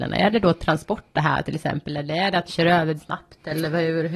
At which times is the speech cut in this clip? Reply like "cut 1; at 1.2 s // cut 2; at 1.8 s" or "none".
cut 1; at 1.1 s // cut 2; at 2.5 s // cut 3; at 3.0 s